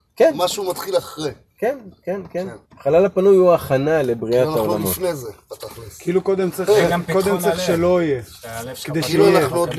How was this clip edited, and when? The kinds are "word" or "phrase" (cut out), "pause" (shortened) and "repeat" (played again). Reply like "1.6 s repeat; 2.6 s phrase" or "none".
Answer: 2.7 s pause